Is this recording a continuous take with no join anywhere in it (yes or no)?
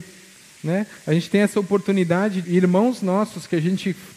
no